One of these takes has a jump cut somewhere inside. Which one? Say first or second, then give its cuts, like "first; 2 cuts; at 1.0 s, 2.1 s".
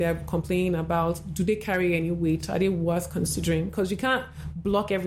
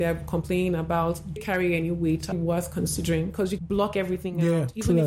second; 3 cuts; at 1.4 s, 2.3 s, 3.6 s